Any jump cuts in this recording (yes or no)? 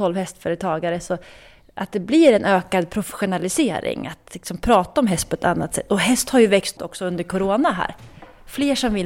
yes